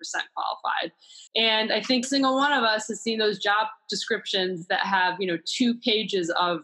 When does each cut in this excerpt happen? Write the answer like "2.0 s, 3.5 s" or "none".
1.3 s, 2.0 s